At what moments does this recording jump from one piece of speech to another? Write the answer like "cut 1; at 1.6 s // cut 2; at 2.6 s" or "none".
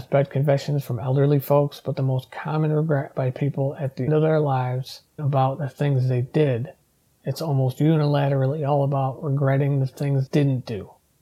cut 1; at 4.1 s // cut 2; at 5.2 s // cut 3; at 10.3 s